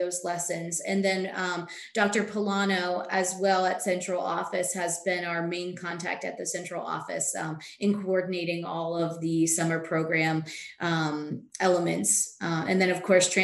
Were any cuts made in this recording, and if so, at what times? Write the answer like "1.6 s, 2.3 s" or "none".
none